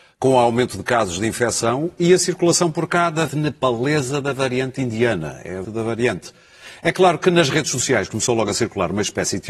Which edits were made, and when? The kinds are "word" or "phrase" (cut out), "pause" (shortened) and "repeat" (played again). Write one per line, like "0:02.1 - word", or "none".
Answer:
0:03.3 - word
0:05.6 - word